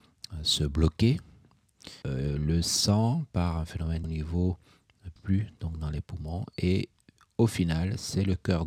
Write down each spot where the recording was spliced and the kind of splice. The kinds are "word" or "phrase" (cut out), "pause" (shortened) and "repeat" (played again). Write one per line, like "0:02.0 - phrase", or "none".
0:02.0 - word
0:04.0 - word
0:05.2 - phrase